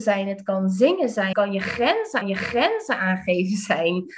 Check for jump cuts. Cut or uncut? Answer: cut